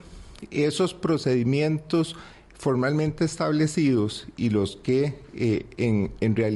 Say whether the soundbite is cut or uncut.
uncut